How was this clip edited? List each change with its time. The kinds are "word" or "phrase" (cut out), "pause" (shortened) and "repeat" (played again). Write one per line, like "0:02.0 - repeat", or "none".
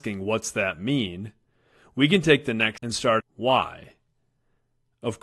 0:02.8 - word
0:03.2 - word